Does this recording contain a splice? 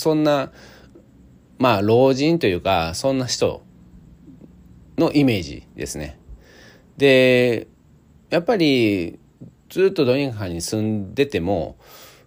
no; 0 cuts

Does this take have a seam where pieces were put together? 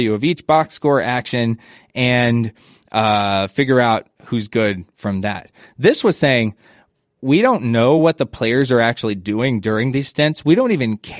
no; 0 cuts

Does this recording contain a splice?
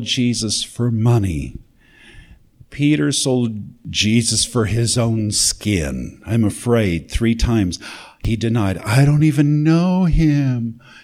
no; 0 cuts

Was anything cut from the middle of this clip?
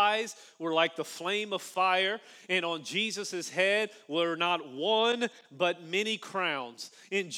no; 0 cuts

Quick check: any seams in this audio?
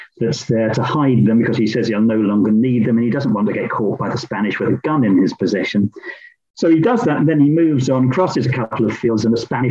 no; 0 cuts

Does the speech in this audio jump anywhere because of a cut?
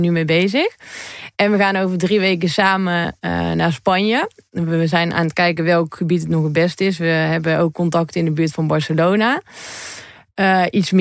no; 0 cuts

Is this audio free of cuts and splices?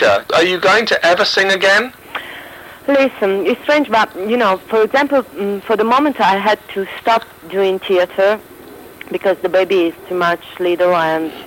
yes; 0 cuts

